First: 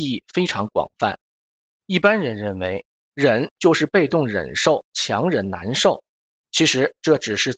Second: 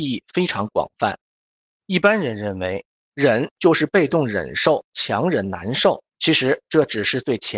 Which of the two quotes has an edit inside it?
second; 1 cut; at 6.1 s

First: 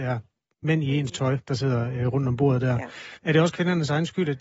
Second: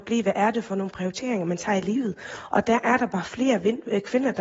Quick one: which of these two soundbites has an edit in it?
first; 1 cut; at 3.2 s

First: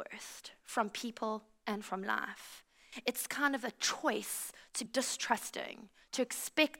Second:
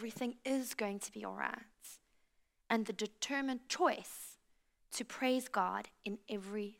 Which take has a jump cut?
first; 1 cut; at 4.9 s

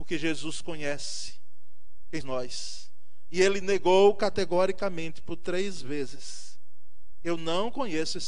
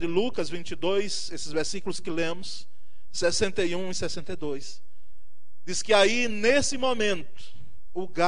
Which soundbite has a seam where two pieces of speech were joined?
first; 1 cut; at 2.2 s

